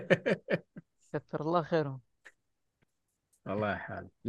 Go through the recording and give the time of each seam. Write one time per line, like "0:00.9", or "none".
none